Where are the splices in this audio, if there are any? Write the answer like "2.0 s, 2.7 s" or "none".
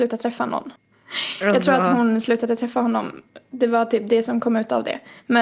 none